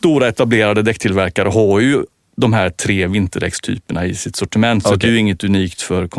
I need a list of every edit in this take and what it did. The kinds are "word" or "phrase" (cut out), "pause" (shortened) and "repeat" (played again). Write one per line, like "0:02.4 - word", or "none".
none